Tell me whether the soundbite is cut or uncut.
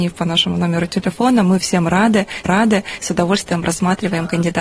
cut